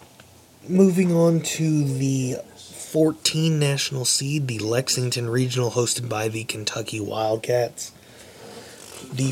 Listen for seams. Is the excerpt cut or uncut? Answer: uncut